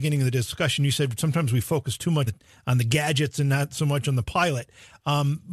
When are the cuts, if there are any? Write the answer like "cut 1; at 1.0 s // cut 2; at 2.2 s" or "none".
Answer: cut 1; at 2.3 s